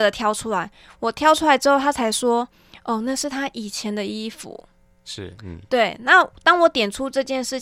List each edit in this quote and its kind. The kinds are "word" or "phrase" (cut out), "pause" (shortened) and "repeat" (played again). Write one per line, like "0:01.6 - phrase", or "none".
none